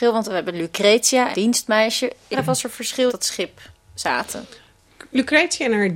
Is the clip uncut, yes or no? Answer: no